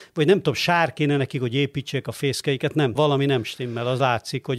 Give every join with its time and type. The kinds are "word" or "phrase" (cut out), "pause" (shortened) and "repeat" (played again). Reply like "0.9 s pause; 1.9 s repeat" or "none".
3.0 s phrase